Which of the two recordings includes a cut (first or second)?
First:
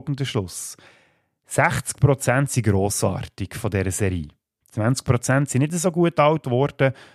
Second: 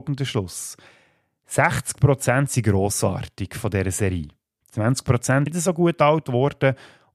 second